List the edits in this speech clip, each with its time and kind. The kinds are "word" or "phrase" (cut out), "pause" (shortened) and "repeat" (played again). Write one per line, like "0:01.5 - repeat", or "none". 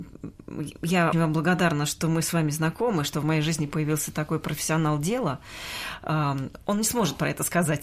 0:01.1 - word